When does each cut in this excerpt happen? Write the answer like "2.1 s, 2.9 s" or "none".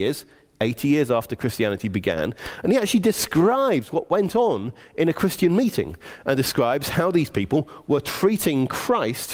none